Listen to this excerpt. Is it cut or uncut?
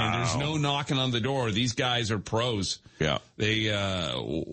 uncut